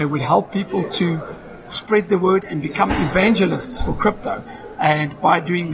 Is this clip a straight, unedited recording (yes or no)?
yes